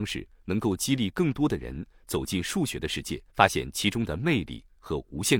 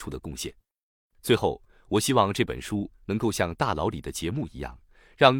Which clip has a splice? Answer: first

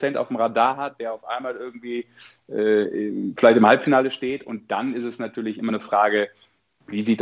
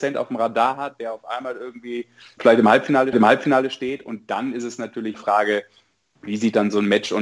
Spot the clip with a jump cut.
second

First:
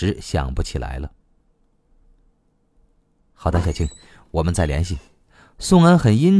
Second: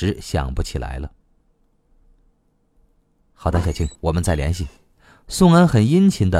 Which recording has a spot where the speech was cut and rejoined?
second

